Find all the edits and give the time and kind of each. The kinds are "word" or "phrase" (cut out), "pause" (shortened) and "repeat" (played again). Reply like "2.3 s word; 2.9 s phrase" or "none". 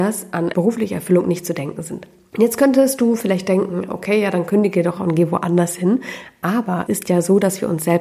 5.0 s word; 6.9 s word